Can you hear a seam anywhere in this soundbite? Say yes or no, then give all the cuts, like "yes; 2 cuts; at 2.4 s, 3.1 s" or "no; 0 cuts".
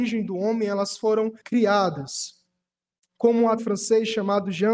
yes; 2 cuts; at 1.4 s, 3.6 s